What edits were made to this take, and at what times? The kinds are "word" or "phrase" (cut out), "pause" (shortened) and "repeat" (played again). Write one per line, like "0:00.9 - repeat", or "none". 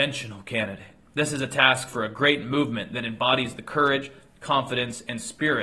none